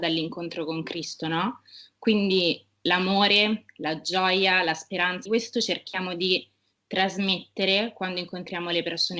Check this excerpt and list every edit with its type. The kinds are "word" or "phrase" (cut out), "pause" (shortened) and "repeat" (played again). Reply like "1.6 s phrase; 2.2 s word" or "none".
5.3 s word